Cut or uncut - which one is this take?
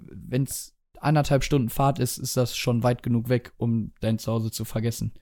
uncut